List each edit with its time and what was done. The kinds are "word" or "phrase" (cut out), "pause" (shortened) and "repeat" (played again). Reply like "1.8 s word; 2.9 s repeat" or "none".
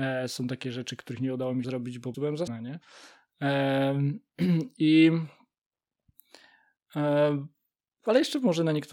1.6 s word; 2.1 s word; 2.5 s word